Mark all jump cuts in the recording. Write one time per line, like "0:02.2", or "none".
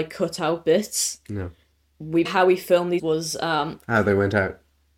0:02.2
0:03.0